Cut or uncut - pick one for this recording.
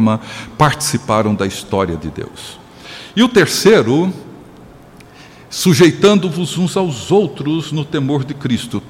uncut